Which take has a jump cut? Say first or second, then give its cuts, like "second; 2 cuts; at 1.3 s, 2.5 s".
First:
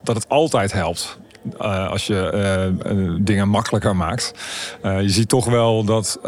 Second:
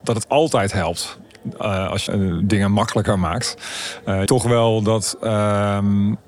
second; 2 cuts; at 2.1 s, 4.3 s